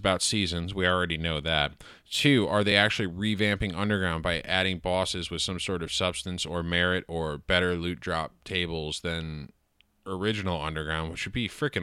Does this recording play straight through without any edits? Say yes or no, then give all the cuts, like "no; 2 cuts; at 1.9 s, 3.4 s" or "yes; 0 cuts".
yes; 0 cuts